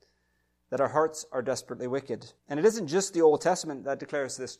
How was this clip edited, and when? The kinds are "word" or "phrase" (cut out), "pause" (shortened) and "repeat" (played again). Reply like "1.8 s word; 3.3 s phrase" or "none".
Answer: 2.4 s pause